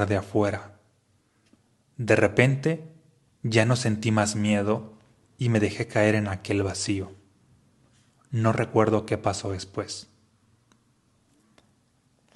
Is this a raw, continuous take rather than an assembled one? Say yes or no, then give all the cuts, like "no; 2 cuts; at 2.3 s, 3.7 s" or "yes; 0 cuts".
yes; 0 cuts